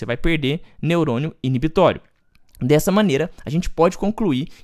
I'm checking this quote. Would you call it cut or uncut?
uncut